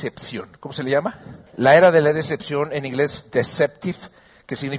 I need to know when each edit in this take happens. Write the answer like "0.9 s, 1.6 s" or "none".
1.5 s